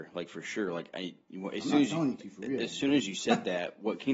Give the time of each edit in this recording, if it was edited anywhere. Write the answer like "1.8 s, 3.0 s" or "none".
none